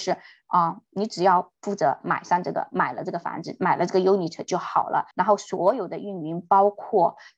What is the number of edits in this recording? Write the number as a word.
two